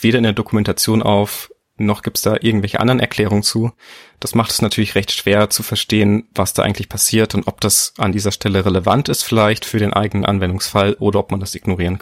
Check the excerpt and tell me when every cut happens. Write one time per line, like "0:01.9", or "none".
none